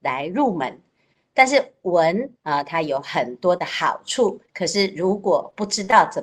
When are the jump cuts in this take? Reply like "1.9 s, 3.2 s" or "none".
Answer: 2.4 s, 4.5 s